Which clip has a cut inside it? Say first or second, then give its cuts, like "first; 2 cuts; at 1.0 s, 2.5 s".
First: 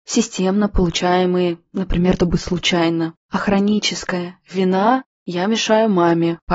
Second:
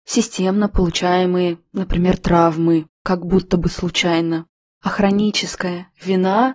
first; 2 cuts; at 2.2 s, 3.2 s